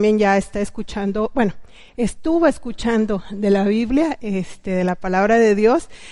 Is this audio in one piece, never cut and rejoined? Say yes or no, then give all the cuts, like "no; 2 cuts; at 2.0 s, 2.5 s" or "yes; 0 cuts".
yes; 0 cuts